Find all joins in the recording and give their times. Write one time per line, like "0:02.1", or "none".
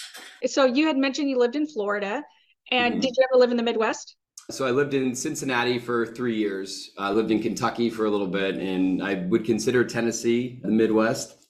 none